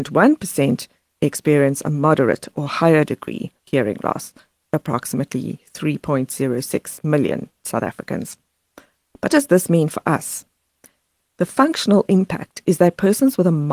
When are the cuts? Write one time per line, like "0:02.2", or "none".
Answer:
0:03.6
0:09.3